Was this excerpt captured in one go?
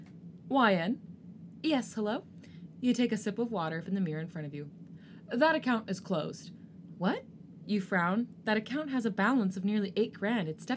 no; 1 cut; at 3.8 s

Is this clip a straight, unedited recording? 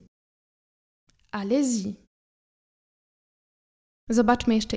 yes; 0 cuts

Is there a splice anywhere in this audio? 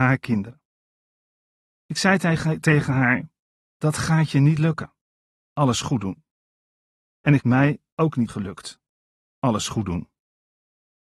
yes; 2 cuts; at 7.4 s, 8.3 s

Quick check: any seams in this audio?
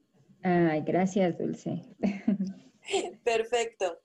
yes; 1 cut; at 1.9 s

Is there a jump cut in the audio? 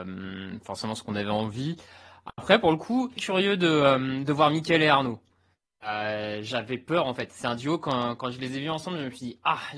yes; 1 cut; at 3.2 s

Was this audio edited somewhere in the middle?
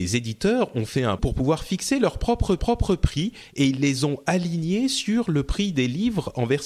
yes; 2 cuts; at 1.2 s, 2.6 s

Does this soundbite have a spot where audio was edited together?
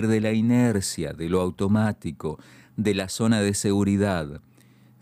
no; 0 cuts

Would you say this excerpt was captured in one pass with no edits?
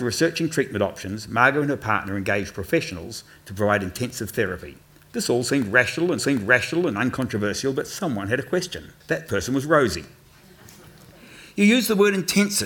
no; 3 cuts; at 4.9 s, 6.2 s, 9.0 s

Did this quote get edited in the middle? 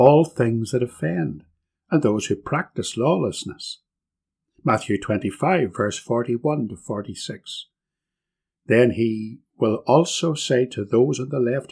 no; 0 cuts

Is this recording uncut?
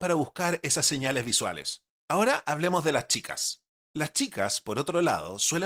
no; 2 cuts; at 2.0 s, 3.7 s

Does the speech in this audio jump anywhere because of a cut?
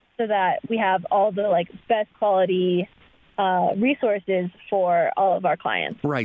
no; 0 cuts

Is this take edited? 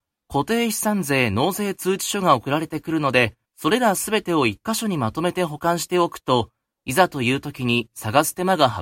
yes; 1 cut; at 3.4 s

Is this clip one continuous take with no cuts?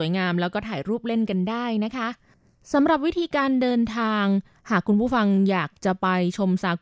yes; 0 cuts

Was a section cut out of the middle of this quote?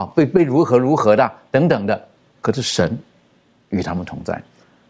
yes; 1 cut; at 2.2 s

